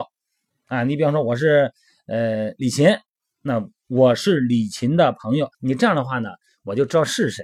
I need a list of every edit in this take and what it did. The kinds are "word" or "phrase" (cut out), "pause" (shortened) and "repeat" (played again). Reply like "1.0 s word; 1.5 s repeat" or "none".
5.5 s pause